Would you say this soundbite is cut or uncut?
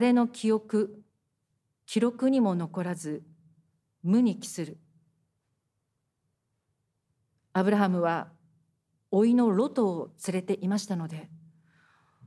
uncut